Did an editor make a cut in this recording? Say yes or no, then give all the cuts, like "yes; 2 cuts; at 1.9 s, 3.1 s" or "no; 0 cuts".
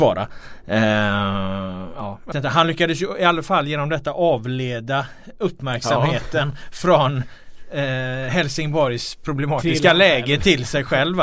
yes; 1 cut; at 2.3 s